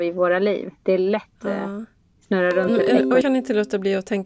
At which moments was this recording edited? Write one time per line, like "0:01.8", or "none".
0:01.4
0:03.2